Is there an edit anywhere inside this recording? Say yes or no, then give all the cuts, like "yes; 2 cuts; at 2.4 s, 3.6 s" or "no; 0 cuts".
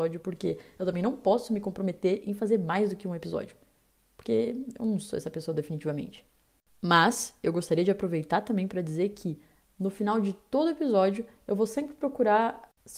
no; 0 cuts